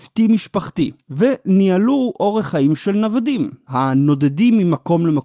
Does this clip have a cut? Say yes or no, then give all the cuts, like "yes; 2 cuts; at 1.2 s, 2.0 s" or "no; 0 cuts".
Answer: no; 0 cuts